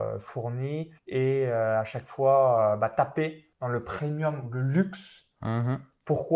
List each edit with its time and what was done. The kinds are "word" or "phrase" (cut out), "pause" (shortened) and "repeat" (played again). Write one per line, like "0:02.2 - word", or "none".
0:01.0 - pause
0:03.5 - pause